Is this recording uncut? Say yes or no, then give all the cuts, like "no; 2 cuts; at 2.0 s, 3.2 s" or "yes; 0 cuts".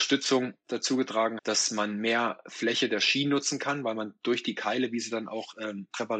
no; 1 cut; at 1.4 s